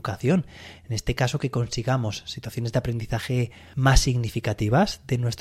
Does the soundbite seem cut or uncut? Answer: uncut